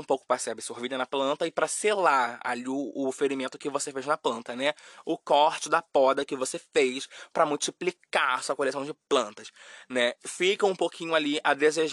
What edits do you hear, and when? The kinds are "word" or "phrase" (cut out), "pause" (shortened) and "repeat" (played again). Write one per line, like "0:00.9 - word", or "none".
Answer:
none